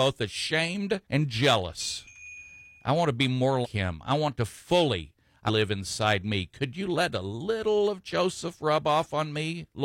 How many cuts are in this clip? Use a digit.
3